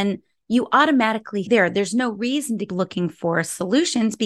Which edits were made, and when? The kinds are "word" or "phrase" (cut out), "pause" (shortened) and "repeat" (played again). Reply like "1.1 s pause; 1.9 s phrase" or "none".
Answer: 1.5 s phrase; 2.7 s word